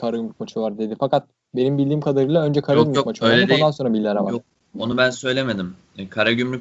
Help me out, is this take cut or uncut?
uncut